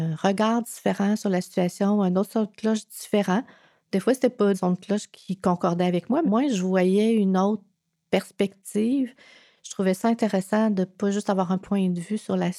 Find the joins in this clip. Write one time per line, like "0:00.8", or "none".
0:04.5
0:06.2